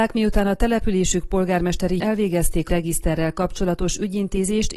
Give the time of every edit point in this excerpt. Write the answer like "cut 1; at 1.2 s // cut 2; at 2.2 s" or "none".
cut 1; at 2.0 s // cut 2; at 2.7 s